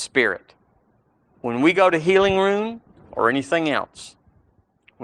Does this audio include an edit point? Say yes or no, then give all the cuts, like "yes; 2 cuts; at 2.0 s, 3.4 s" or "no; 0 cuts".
no; 0 cuts